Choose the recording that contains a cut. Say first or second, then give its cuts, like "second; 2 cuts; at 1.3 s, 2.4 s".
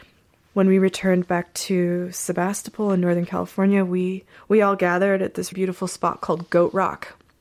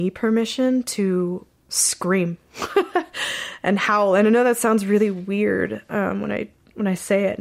first; 2 cuts; at 4.3 s, 5.5 s